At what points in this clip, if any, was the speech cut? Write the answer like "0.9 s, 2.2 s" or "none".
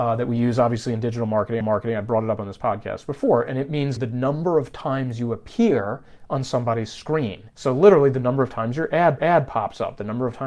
1.6 s, 4.0 s, 7.5 s, 9.2 s